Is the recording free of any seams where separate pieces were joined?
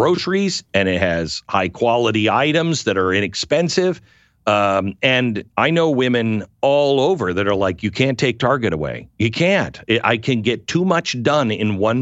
yes; 0 cuts

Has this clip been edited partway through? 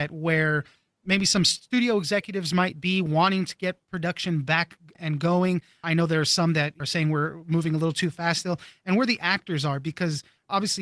no; 0 cuts

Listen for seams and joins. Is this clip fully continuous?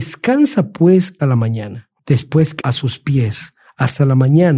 no; 3 cuts; at 1.2 s, 2.0 s, 2.6 s

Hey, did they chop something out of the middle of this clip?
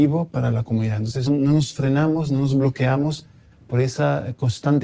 yes; 1 cut; at 1.3 s

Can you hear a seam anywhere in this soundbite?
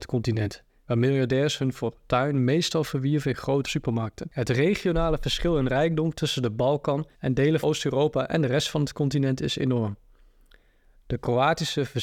yes; 3 cuts; at 3.6 s, 7.1 s, 7.6 s

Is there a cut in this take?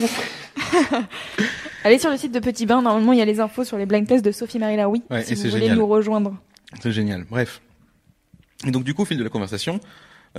no; 0 cuts

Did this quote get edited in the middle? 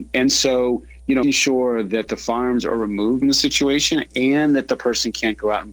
yes; 2 cuts; at 1.2 s, 3.2 s

